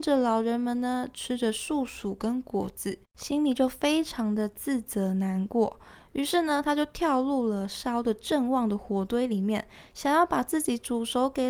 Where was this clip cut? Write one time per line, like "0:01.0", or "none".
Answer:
0:03.0